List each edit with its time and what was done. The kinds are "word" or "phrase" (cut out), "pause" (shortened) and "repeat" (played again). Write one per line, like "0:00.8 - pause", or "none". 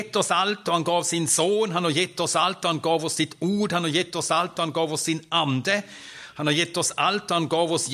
none